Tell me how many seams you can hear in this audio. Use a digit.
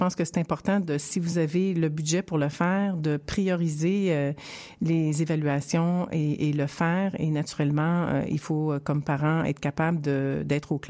0